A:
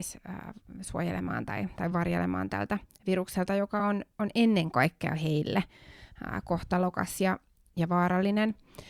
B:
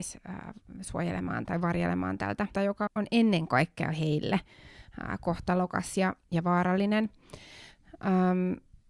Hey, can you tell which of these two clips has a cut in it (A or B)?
B